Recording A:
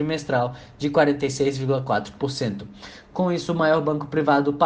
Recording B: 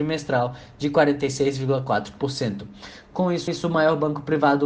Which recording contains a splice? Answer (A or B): B